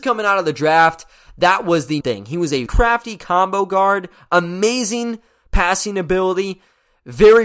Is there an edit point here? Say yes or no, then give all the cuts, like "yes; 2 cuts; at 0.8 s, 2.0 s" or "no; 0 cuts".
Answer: yes; 2 cuts; at 2.0 s, 2.7 s